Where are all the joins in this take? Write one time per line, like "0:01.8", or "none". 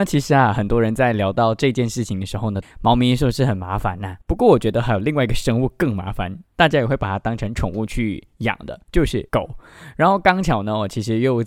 0:02.6
0:04.2
0:08.8
0:09.3